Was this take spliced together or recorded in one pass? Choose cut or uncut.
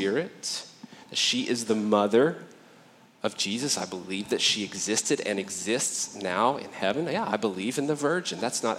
uncut